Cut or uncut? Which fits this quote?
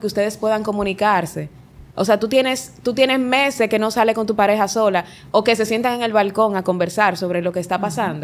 uncut